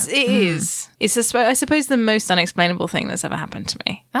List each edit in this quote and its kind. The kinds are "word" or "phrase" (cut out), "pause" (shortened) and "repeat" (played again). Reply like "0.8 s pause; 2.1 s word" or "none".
0.9 s pause